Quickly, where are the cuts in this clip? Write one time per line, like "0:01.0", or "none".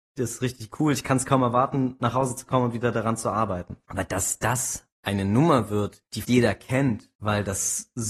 0:06.2